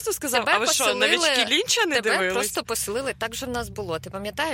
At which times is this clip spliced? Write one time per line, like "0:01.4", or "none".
none